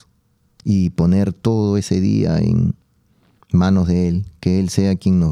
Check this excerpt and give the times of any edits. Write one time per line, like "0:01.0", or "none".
none